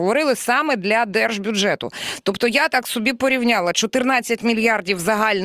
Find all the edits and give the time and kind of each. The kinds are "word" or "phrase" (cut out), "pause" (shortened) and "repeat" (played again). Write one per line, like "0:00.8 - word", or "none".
none

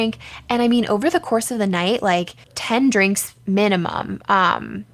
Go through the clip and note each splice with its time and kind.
0:02.4 - pause

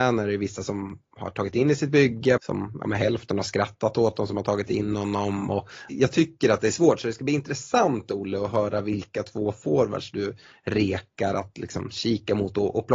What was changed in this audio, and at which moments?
0:02.4 - word
0:05.9 - phrase

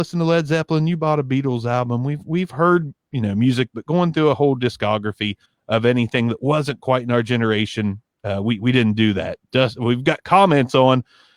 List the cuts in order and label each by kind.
0:05.5 - pause

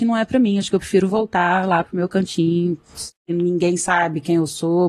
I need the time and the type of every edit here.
0:03.2 - pause

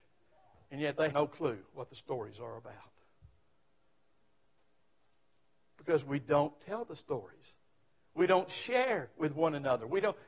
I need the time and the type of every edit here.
0:01.1 - word

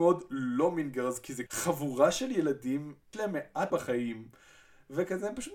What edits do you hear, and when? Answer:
0:01.5 - word
0:03.1 - word
0:03.7 - word

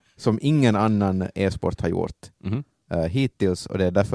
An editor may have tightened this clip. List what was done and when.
none

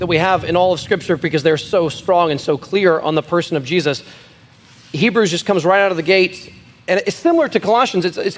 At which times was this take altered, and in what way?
none

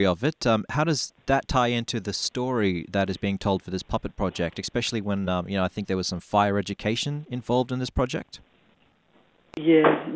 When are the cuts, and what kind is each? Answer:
none

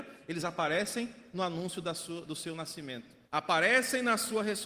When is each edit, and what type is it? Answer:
0:03.3 - pause

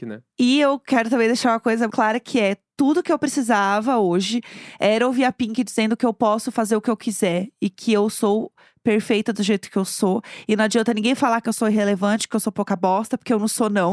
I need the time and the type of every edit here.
0:01.9 - word

